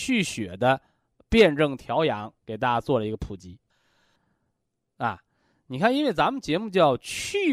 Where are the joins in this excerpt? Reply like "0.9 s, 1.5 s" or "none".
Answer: 2.4 s